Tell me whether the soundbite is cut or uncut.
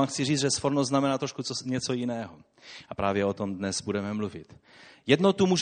uncut